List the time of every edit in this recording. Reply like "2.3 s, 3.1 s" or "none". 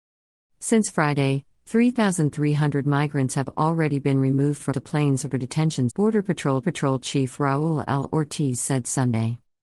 4.7 s, 5.9 s, 6.6 s